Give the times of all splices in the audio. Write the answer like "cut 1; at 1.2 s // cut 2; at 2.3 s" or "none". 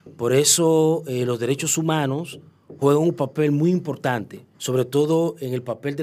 cut 1; at 4.5 s

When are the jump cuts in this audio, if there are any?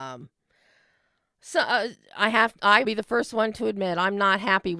cut 1; at 2.8 s

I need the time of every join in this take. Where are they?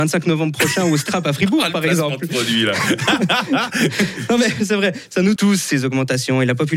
cut 1; at 5.4 s

